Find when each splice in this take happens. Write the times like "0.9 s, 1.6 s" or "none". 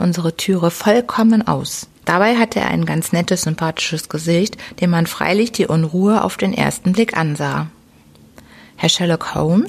2.0 s